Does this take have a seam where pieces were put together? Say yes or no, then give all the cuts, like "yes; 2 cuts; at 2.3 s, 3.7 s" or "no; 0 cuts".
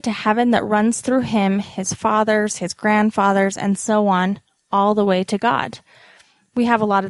no; 0 cuts